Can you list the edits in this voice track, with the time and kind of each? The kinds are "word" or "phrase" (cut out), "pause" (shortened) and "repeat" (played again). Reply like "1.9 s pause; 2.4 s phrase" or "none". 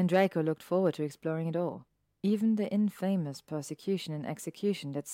none